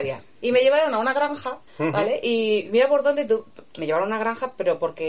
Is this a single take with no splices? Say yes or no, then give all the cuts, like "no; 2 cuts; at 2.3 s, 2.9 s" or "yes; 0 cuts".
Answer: no; 1 cut; at 1.7 s